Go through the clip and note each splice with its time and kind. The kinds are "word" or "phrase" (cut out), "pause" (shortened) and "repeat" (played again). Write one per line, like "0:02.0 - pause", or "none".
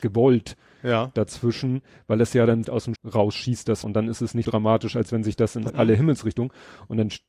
0:02.6 - word
0:03.0 - word
0:03.8 - word
0:04.4 - word
0:05.7 - word